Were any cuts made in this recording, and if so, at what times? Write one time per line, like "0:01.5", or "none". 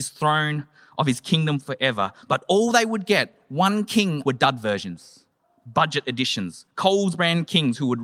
0:04.2

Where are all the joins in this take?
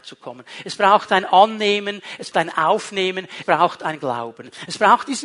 0:02.3
0:03.4

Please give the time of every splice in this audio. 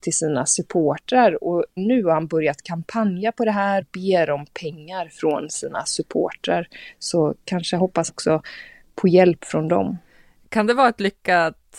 0:01.8
0:03.8
0:08.1

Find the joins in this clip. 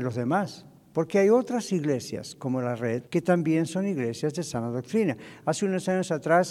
0:03.1

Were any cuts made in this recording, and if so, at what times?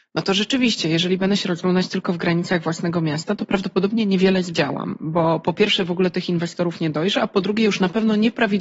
none

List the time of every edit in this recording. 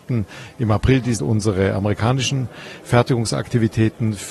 0:01.2

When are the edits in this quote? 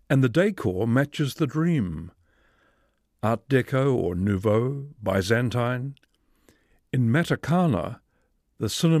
none

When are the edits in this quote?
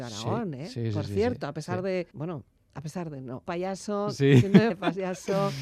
0:02.1
0:03.5
0:04.7

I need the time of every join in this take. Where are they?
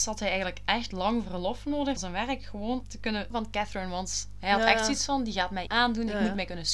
0:02.0
0:02.8
0:03.3
0:05.7

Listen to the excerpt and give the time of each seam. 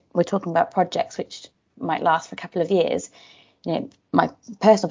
none

